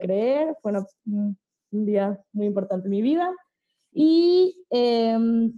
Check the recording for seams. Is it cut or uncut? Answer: uncut